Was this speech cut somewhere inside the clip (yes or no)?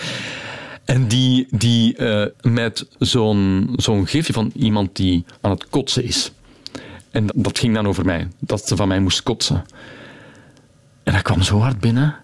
yes